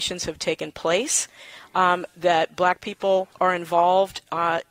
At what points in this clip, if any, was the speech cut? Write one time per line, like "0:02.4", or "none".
0:03.3